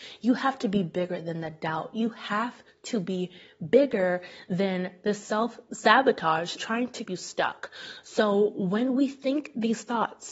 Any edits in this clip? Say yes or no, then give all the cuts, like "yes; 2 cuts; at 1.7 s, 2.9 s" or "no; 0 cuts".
yes; 2 cuts; at 6.6 s, 7.0 s